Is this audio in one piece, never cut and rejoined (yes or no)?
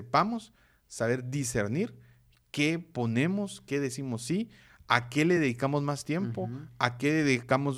yes